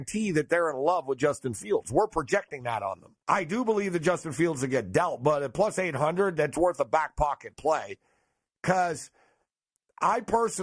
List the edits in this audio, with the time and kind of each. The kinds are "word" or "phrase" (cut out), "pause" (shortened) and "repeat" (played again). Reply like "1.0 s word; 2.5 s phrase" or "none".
3.2 s pause